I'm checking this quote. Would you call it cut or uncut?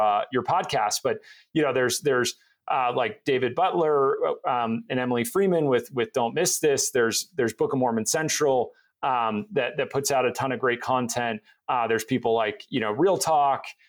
uncut